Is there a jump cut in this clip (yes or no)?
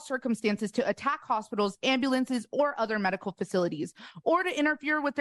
no